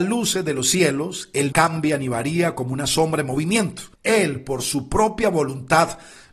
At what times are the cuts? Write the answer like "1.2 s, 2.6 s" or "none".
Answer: 1.5 s, 3.9 s